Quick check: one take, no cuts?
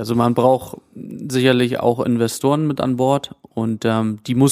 yes; 0 cuts

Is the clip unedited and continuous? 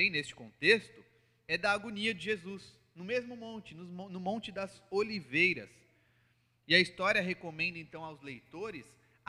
yes; 0 cuts

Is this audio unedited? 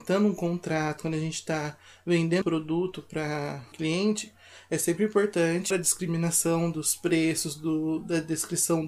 no; 3 cuts; at 2.4 s, 3.7 s, 5.7 s

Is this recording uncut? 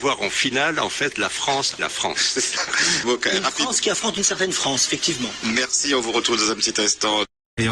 no; 2 cuts; at 1.8 s, 3.0 s

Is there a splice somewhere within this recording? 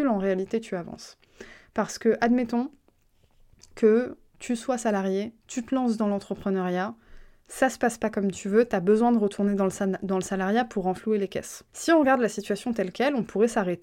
yes; 3 cuts; at 4.3 s, 5.4 s, 11.7 s

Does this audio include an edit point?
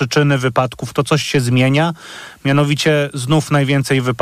no; 0 cuts

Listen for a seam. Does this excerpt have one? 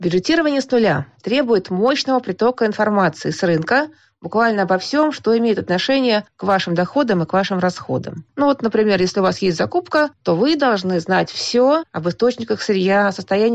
no; 0 cuts

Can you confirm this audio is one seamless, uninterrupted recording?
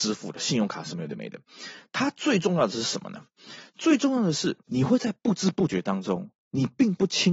no; 1 cut; at 4.6 s

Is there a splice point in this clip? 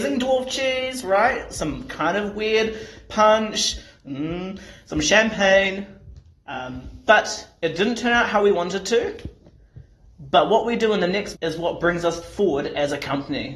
yes; 1 cut; at 11.3 s

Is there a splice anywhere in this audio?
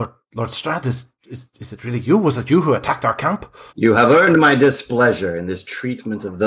yes; 2 cuts; at 1.2 s, 3.7 s

